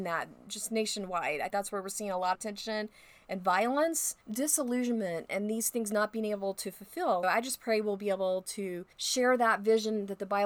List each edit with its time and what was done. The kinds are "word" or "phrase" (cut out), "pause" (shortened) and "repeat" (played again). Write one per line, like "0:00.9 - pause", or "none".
0:01.5 - word
0:02.3 - phrase
0:04.2 - pause
0:07.2 - word
0:08.9 - pause